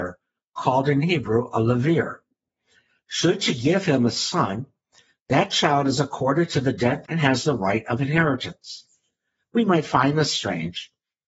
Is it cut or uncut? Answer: cut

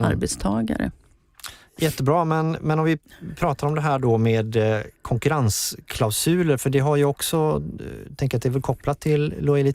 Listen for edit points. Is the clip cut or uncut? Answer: uncut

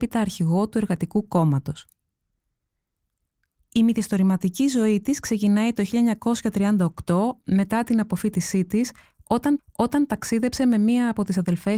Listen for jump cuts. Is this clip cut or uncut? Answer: cut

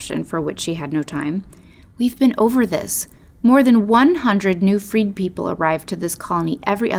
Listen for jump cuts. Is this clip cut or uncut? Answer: uncut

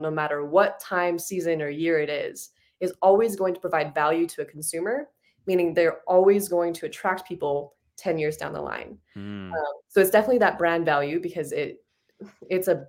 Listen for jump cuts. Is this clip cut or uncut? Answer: uncut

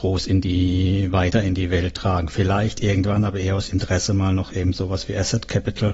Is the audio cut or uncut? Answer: uncut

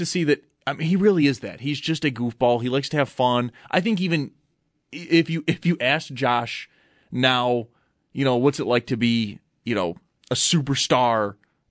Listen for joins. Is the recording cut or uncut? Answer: uncut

